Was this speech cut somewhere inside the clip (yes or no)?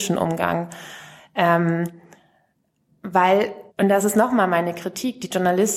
yes